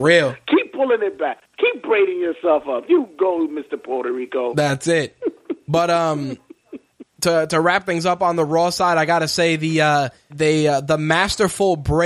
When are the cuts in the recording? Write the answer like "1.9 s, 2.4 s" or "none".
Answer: 10.3 s